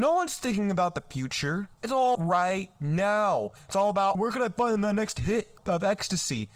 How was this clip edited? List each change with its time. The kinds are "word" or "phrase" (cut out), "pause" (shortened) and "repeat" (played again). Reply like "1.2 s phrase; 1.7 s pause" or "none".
1.7 s pause; 2.1 s word; 4.1 s word; 5.6 s word